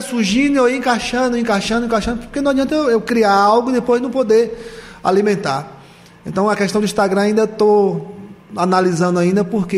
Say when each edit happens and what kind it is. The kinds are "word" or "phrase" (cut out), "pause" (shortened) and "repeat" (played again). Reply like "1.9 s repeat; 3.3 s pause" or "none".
none